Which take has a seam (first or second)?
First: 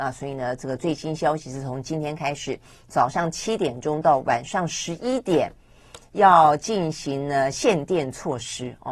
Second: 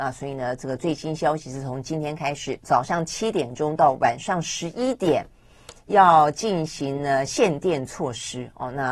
second